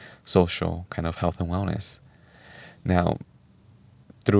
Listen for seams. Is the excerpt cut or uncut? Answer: uncut